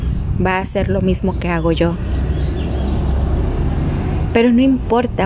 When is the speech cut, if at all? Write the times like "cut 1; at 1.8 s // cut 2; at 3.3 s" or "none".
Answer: none